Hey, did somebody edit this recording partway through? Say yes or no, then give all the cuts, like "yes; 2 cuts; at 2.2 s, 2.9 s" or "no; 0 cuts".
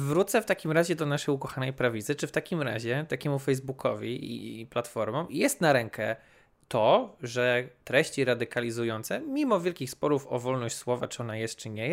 no; 0 cuts